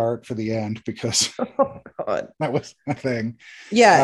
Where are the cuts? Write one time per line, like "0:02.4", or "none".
0:02.3
0:03.0